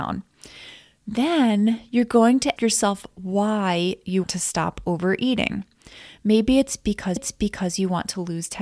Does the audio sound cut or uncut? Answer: cut